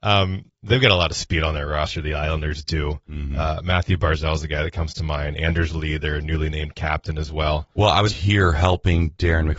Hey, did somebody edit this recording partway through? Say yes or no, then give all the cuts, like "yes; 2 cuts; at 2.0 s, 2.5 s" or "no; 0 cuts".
yes; 1 cut; at 8.1 s